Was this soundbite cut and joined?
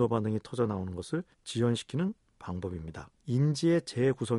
yes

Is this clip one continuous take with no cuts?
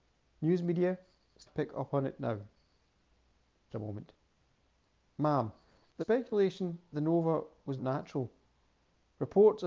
no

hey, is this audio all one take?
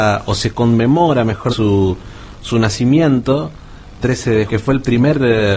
no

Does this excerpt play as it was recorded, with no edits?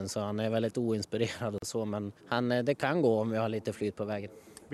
no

